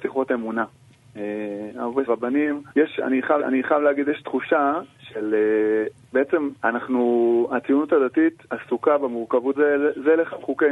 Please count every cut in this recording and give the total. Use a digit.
6